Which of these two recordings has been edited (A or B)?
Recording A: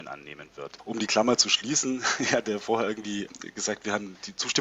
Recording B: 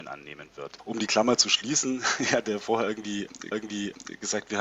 B